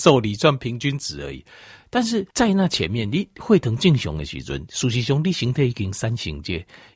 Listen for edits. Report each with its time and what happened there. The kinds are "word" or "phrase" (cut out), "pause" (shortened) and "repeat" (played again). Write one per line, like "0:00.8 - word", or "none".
0:02.3 - pause